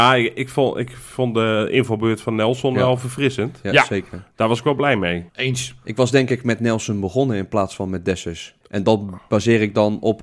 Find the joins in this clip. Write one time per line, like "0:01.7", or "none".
0:05.3
0:08.6

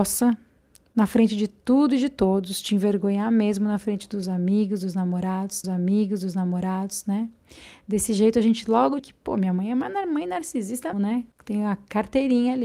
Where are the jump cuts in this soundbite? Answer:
0:05.6
0:09.0
0:10.9
0:11.3

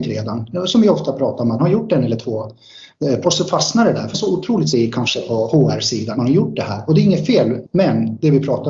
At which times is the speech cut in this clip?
0:01.6
0:03.2
0:04.1
0:04.7
0:06.1
0:07.6

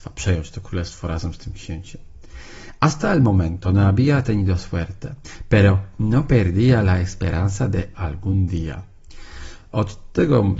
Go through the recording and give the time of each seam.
0:07.9

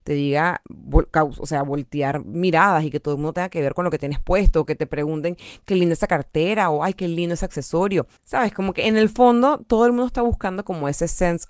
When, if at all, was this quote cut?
0:08.2

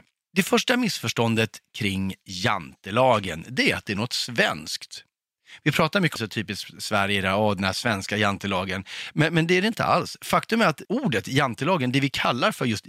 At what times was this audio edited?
0:06.2
0:10.8

